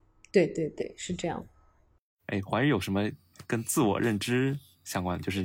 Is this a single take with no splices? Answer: yes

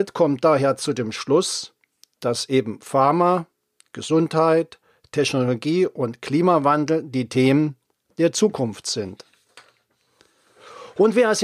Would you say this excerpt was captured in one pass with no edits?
yes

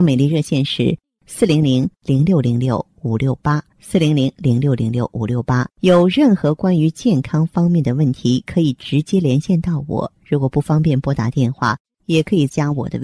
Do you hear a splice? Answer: yes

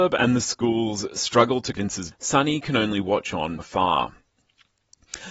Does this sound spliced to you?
yes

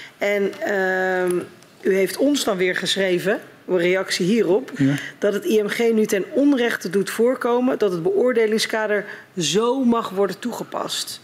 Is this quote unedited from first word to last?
yes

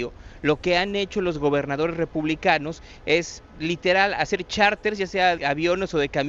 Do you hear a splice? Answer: yes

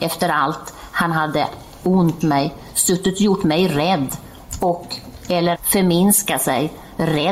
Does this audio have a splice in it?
yes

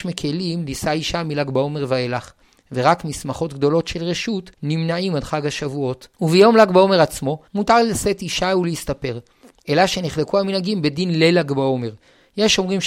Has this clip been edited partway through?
yes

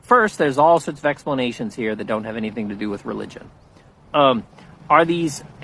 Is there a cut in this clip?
no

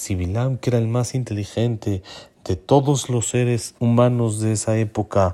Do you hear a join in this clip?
yes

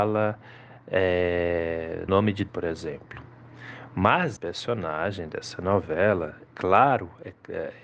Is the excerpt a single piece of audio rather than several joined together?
no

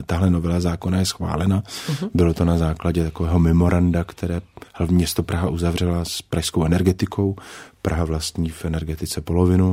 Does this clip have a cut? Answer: yes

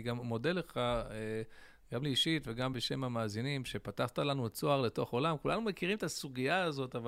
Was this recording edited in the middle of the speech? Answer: no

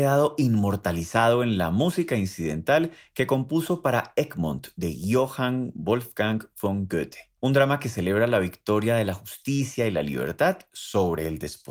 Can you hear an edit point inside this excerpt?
yes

